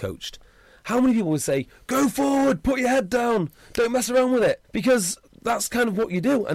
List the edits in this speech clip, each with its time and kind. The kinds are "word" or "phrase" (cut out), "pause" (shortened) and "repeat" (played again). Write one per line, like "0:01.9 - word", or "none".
0:04.6 - pause